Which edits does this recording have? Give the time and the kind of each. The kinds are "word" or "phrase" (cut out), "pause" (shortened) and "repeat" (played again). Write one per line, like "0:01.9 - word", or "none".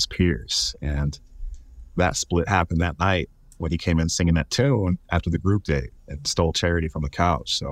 0:06.0 - pause